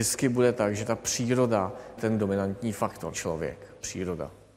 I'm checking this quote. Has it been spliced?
yes; 2 cuts; at 2.0 s, 3.1 s

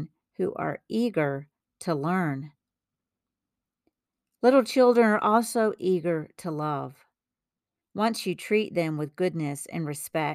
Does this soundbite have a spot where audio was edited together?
no; 0 cuts

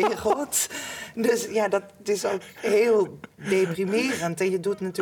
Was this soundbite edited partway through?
no; 0 cuts

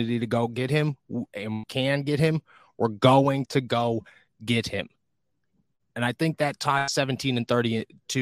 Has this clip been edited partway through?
no; 0 cuts

